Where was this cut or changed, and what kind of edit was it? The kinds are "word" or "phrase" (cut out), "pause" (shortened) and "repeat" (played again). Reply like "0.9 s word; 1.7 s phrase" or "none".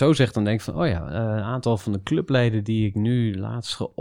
none